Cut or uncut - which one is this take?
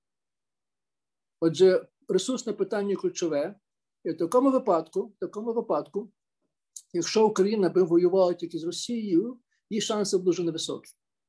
uncut